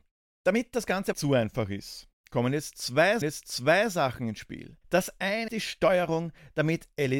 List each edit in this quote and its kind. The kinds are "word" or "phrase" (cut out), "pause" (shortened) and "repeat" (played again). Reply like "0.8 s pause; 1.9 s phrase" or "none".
1.1 s word; 2.1 s pause; 3.2 s repeat; 4.8 s pause; 5.5 s word